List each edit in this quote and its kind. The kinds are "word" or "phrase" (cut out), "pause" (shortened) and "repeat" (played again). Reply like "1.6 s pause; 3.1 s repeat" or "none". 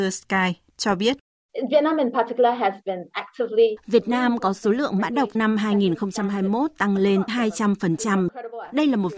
5.4 s word; 7.3 s word